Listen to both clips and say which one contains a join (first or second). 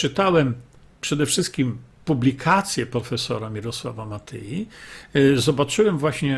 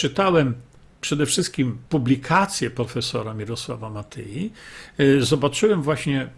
second